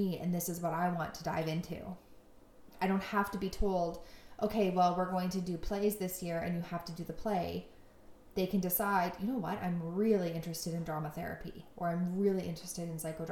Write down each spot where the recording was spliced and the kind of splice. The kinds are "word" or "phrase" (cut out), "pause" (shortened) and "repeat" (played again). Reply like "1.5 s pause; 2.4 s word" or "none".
none